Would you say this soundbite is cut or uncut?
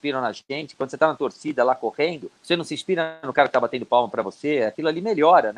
cut